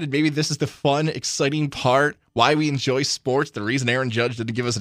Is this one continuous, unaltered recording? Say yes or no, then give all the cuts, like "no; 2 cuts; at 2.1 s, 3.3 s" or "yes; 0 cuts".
yes; 0 cuts